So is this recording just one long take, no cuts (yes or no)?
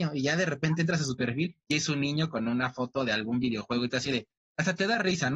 yes